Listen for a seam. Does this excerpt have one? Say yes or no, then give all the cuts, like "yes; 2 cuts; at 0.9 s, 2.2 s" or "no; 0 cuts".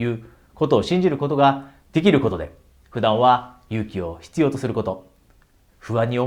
no; 0 cuts